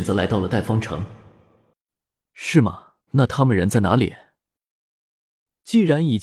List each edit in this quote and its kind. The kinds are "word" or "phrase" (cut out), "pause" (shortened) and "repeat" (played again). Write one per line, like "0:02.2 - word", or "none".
0:03.0 - pause